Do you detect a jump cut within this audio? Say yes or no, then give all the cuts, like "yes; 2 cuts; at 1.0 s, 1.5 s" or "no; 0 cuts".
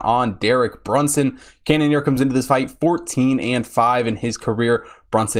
no; 0 cuts